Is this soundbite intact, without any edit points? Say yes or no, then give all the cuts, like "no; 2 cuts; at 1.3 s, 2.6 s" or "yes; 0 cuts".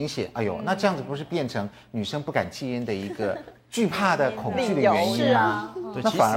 yes; 0 cuts